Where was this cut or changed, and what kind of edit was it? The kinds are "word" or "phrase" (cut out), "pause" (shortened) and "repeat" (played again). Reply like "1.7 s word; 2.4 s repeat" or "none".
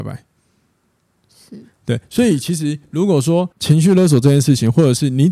3.5 s pause